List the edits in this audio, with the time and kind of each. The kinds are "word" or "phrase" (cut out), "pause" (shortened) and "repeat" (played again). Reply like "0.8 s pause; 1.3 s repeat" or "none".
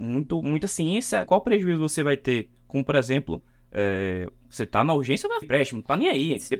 1.3 s word; 5.4 s word